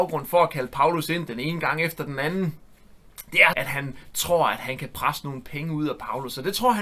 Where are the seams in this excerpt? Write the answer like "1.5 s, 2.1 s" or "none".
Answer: 3.5 s